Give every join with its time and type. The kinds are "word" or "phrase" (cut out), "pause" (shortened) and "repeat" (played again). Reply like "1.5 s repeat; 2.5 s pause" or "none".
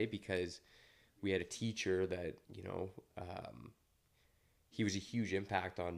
2.4 s pause